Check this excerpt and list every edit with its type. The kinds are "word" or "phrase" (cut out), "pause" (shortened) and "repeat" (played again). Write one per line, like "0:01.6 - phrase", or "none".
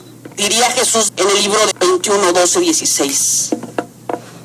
0:01.1 - phrase
0:01.7 - word